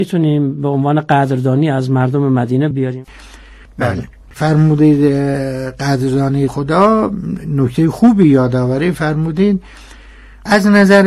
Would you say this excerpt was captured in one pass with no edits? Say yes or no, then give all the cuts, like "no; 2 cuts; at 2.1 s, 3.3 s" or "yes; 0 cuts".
no; 2 cuts; at 2.7 s, 6.5 s